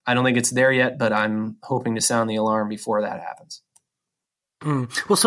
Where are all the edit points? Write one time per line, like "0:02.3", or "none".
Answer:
none